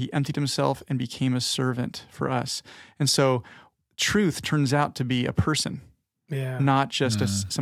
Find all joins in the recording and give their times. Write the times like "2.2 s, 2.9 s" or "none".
none